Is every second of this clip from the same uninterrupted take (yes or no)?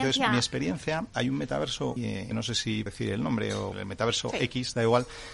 no